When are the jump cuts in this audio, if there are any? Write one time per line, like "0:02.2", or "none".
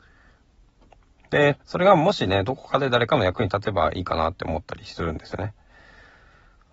0:01.6